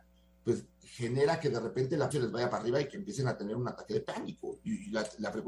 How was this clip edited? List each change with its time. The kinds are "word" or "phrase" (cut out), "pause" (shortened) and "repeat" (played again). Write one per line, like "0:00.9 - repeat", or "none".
0:02.1 - word